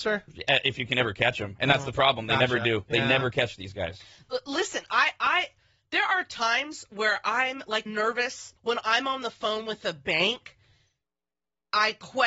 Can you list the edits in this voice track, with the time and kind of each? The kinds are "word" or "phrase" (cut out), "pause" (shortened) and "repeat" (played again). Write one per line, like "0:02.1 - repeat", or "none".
0:07.9 - word
0:08.6 - pause